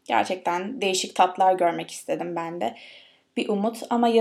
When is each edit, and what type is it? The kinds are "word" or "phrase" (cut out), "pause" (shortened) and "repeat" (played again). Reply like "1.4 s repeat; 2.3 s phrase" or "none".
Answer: none